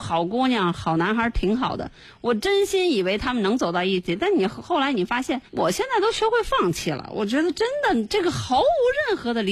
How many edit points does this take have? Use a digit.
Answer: 1